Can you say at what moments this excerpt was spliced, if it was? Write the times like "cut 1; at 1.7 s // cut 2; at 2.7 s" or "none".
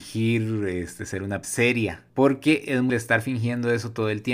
cut 1; at 1.4 s // cut 2; at 2.1 s // cut 3; at 2.9 s